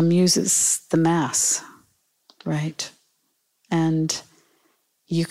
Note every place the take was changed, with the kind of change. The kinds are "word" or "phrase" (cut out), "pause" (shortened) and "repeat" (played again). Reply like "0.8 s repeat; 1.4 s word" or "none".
none